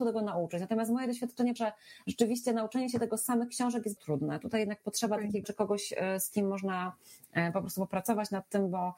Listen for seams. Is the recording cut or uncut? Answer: cut